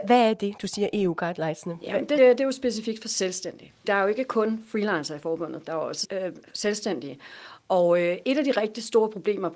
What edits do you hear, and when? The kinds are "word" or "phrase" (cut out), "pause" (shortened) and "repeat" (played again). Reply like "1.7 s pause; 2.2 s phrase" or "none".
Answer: 2.2 s word; 3.8 s word; 6.0 s word